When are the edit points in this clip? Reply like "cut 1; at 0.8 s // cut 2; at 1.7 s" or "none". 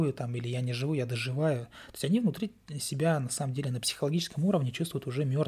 none